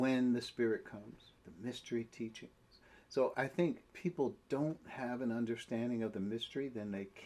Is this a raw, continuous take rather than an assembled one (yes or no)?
no